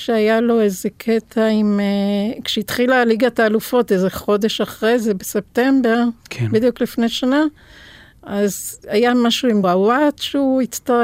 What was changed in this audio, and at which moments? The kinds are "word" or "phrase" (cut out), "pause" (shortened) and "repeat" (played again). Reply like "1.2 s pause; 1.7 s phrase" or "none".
9.6 s word